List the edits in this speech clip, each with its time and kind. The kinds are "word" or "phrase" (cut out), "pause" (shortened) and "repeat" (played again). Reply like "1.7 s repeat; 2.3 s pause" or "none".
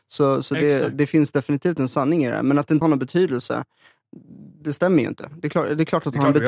2.8 s word